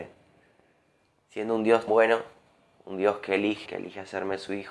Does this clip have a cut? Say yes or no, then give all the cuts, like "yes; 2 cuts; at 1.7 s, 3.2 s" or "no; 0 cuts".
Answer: yes; 2 cuts; at 1.9 s, 3.7 s